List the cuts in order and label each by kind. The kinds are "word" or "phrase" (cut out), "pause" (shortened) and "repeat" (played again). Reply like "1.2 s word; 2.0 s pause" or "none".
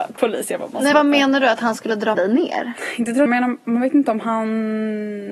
0.9 s word; 2.1 s word; 3.3 s phrase